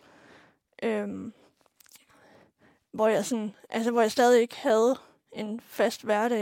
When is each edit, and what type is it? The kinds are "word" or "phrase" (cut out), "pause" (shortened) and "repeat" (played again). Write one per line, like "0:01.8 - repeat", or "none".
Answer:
none